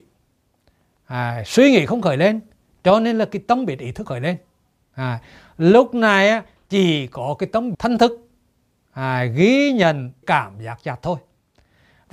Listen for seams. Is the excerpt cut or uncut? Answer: cut